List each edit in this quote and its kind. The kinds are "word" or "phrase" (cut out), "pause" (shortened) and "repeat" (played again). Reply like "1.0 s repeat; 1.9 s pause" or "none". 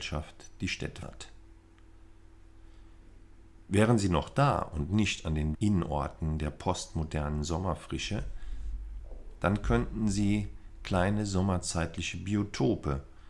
1.0 s word; 5.5 s word